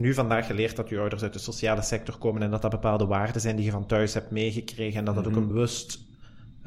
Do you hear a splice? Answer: yes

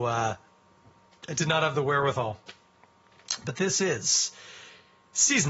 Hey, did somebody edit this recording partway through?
no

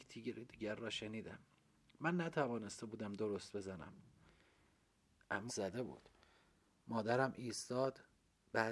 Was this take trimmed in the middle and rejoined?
yes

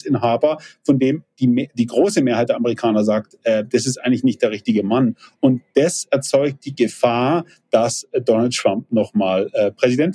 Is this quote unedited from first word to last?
yes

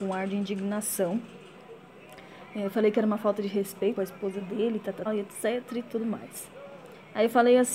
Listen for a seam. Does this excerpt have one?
yes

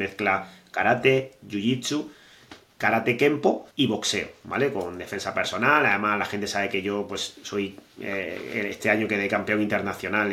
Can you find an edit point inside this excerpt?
yes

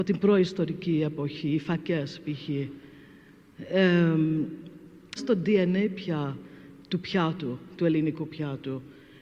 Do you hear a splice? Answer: yes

